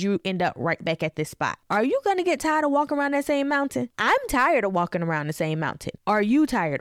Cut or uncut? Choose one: uncut